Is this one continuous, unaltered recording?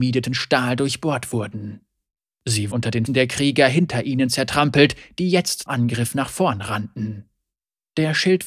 no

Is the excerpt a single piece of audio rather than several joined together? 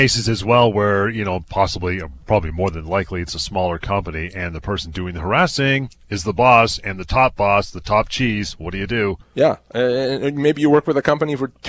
no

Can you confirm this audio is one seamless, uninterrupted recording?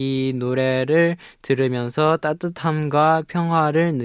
yes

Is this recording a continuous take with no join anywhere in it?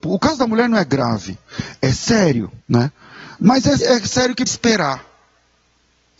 no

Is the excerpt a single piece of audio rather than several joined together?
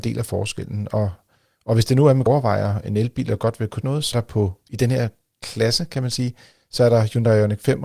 no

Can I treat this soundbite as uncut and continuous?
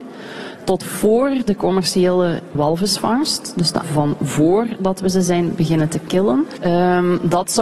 no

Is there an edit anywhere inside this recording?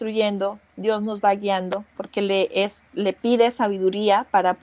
yes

